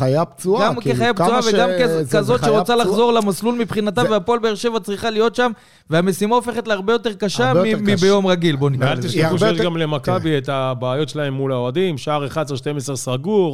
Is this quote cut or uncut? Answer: uncut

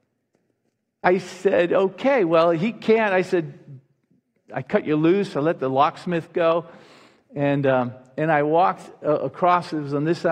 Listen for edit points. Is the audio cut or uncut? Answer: uncut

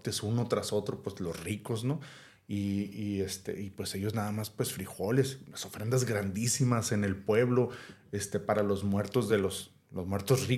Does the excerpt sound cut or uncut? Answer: uncut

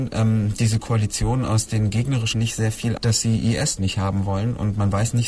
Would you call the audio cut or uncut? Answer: cut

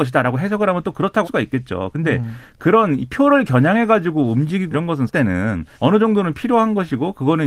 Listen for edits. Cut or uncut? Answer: cut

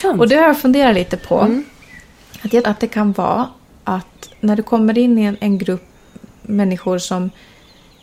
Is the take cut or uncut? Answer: cut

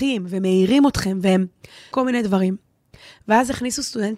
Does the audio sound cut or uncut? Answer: cut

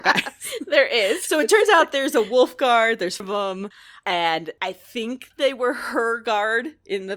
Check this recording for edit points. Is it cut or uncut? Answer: cut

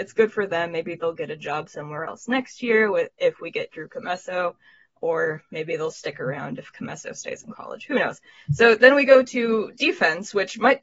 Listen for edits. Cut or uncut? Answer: uncut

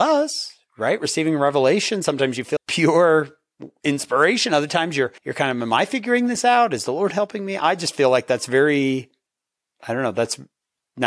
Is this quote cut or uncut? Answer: cut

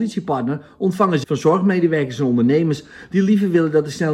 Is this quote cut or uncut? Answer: cut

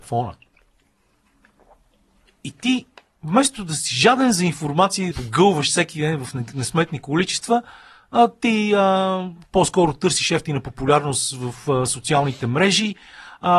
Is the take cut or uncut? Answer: cut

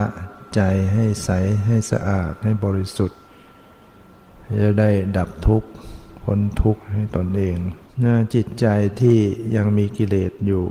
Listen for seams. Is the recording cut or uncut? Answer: cut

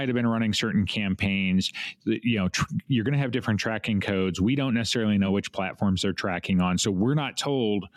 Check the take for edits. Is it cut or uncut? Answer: uncut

